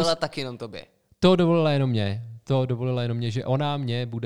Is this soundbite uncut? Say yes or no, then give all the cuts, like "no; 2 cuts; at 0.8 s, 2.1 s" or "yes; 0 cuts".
yes; 0 cuts